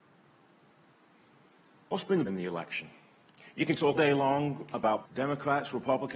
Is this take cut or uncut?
cut